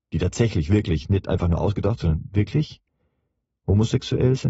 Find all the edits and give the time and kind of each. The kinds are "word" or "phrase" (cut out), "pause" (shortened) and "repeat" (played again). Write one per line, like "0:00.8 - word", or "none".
none